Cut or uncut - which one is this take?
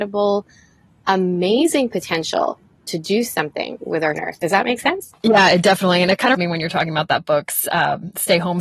cut